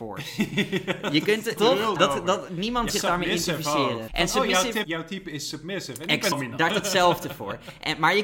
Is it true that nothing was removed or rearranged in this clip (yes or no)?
no